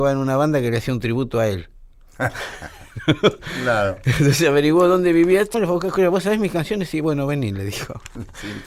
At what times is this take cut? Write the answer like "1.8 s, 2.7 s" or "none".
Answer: 5.5 s

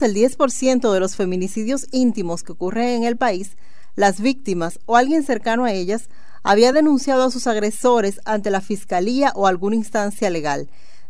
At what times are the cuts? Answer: none

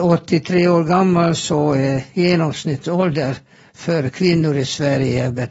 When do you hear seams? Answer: none

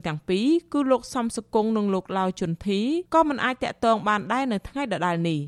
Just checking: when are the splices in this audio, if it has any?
3.1 s

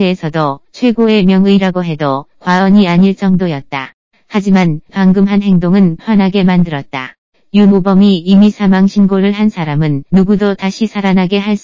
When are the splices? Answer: 4.9 s, 6.0 s

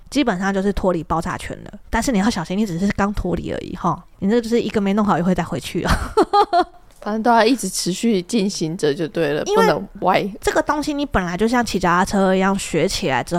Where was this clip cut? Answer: none

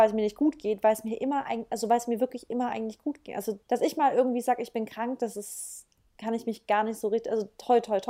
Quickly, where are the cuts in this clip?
3.6 s, 5.9 s

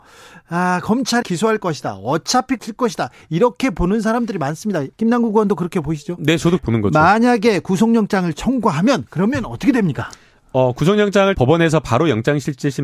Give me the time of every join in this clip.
1.2 s, 2.6 s, 4.9 s, 6.6 s, 9.1 s, 11.3 s

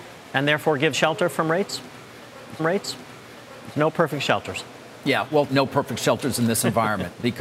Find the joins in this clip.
0.9 s, 2.6 s, 5.5 s

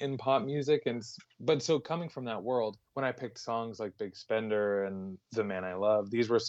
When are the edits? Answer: 2.9 s, 5.2 s

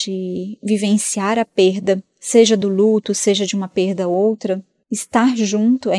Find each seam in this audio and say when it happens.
none

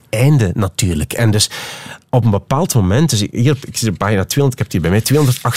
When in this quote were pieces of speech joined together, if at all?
none

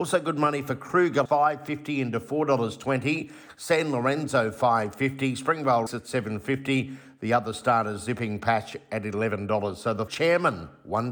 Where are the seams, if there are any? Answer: 1.3 s, 5.9 s, 10.1 s

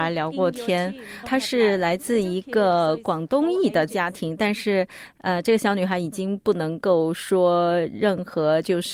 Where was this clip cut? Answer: 1.2 s

